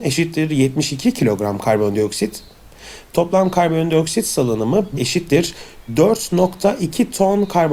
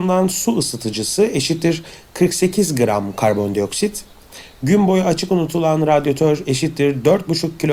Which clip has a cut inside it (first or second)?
first